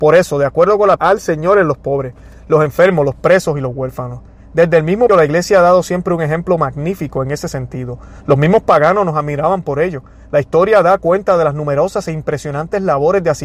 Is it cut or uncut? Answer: cut